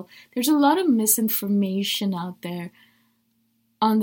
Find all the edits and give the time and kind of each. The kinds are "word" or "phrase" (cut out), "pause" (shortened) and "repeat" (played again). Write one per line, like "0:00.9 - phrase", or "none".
none